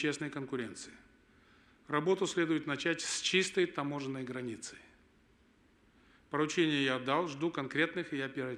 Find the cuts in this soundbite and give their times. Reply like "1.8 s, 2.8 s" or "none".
none

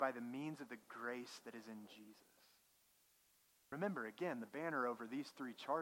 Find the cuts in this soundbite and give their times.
none

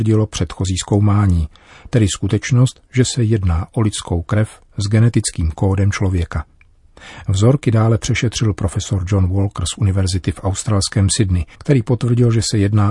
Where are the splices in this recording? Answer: 11.5 s

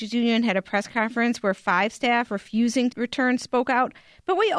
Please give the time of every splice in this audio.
2.9 s

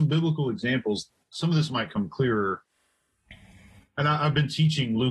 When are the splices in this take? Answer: none

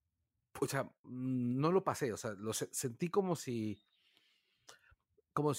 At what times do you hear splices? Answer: none

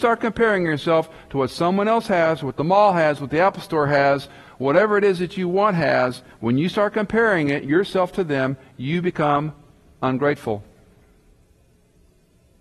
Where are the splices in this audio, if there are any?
none

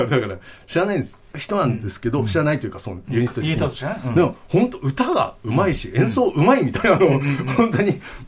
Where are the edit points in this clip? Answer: 1.3 s

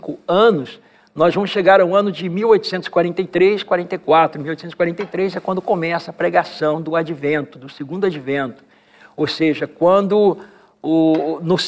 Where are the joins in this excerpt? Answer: none

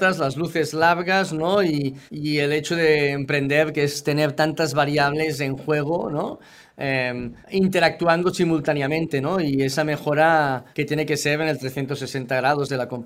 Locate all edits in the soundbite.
2.1 s, 7.4 s, 10.7 s

